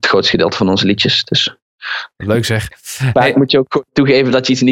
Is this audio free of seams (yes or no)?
no